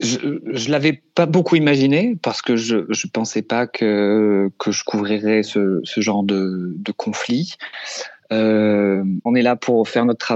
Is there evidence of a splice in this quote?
no; 0 cuts

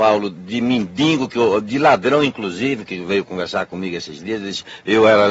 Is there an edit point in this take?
no; 0 cuts

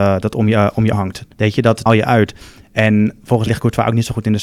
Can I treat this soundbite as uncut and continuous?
no; 4 cuts; at 0.9 s, 1.3 s, 1.9 s, 3.5 s

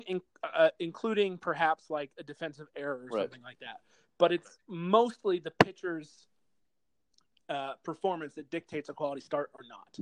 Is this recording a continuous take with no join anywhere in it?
yes; 0 cuts

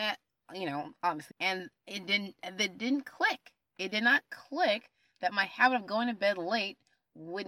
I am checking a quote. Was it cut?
yes; 1 cut; at 1.3 s

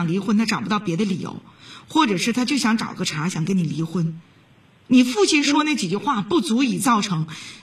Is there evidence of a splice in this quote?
no; 0 cuts

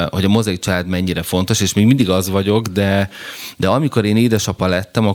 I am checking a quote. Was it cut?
no; 0 cuts

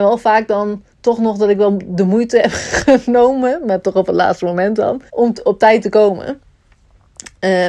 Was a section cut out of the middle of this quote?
yes; 2 cuts; at 0.9 s, 5.1 s

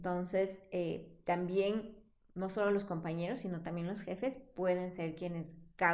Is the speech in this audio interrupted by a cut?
no; 0 cuts

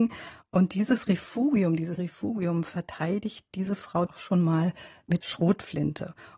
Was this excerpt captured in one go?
no; 3 cuts; at 2.0 s, 4.1 s, 5.2 s

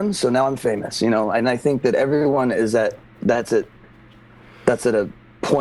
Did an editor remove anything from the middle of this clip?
no; 0 cuts

